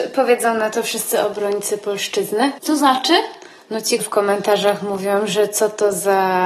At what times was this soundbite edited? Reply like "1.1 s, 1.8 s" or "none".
4.0 s